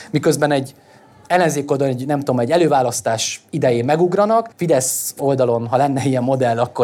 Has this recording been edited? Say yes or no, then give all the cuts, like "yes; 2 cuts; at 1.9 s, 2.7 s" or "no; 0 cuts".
yes; 1 cut; at 4.5 s